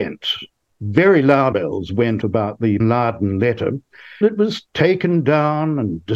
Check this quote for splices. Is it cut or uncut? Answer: cut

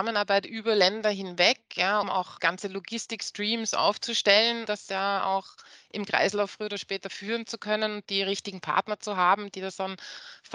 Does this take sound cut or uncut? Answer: cut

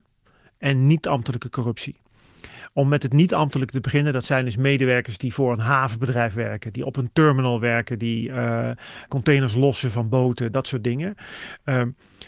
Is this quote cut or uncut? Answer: uncut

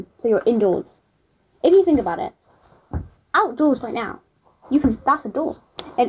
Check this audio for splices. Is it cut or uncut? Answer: uncut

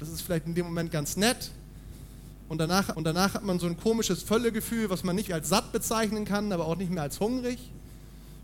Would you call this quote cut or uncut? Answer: cut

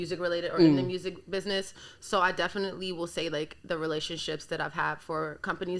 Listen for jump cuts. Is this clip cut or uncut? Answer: uncut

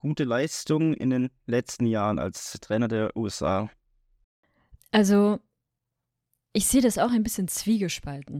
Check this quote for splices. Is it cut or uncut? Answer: uncut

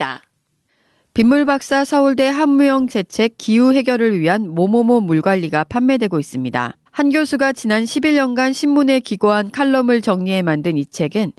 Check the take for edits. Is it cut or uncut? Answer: cut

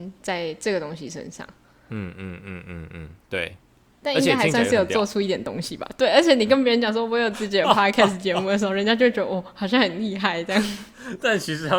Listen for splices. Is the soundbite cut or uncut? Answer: uncut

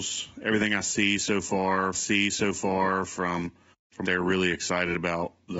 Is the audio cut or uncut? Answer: cut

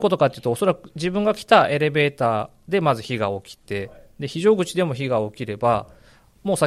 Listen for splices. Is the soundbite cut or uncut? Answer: uncut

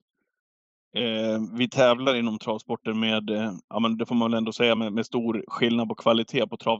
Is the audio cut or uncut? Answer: uncut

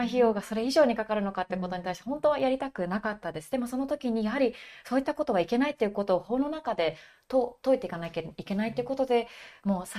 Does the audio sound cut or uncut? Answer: uncut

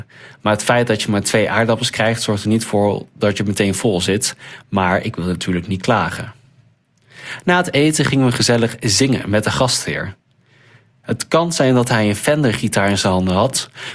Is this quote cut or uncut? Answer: uncut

